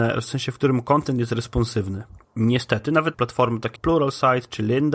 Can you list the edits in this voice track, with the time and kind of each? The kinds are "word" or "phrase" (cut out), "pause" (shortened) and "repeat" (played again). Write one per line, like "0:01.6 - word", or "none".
0:02.2 - pause
0:03.1 - word
0:03.8 - word